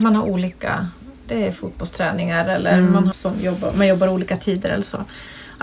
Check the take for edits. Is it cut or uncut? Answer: cut